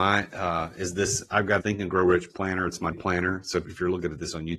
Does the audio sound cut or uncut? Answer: cut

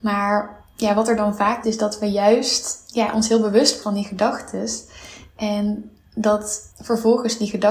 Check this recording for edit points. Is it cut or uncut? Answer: cut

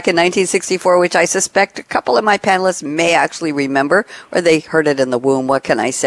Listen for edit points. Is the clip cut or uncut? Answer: uncut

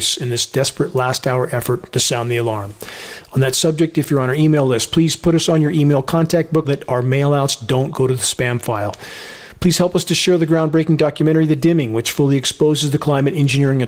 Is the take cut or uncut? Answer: cut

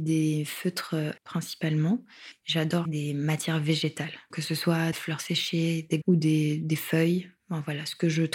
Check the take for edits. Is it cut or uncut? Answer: cut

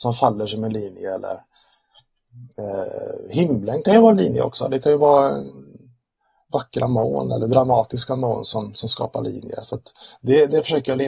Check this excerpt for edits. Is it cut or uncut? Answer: uncut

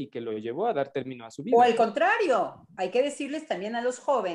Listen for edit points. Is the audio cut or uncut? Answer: uncut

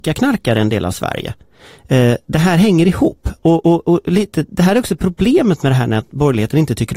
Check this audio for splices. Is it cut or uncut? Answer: uncut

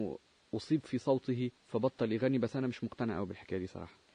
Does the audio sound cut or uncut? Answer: cut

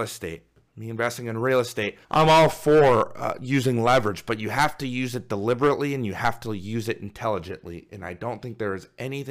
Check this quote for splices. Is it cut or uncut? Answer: cut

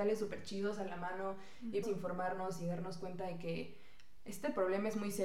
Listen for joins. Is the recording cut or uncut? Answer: cut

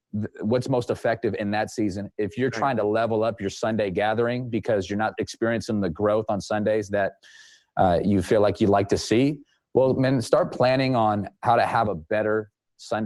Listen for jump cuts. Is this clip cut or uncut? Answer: uncut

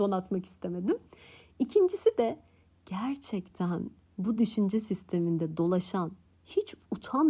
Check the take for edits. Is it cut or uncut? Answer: uncut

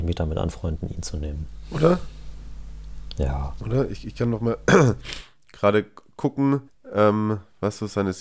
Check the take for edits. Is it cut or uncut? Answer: cut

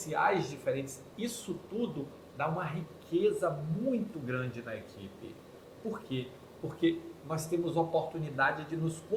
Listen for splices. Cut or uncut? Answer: uncut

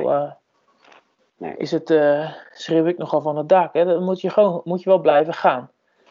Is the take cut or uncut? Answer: uncut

